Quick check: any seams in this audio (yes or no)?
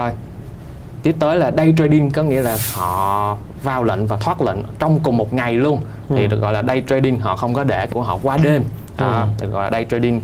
yes